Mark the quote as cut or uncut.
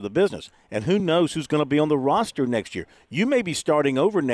uncut